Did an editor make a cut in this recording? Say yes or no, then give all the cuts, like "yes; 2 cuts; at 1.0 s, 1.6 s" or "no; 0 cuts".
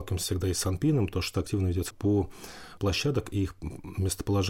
yes; 3 cuts; at 1.3 s, 1.9 s, 2.8 s